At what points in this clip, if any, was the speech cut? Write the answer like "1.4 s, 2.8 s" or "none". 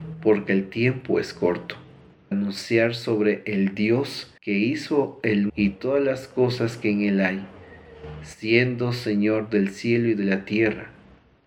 2.3 s, 4.4 s, 5.5 s